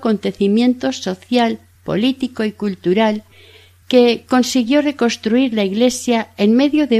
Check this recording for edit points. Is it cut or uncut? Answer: uncut